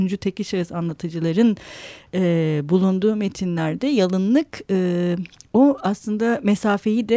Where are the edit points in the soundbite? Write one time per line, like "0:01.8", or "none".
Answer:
none